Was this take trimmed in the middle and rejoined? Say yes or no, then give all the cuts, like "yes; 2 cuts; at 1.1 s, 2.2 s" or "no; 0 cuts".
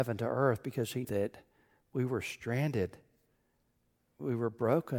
yes; 1 cut; at 1.0 s